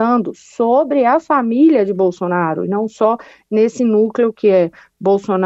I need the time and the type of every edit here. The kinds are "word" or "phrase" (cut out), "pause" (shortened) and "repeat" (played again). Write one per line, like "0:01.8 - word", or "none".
none